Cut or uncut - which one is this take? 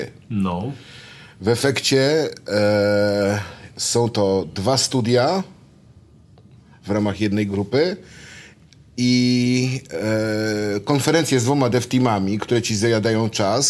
uncut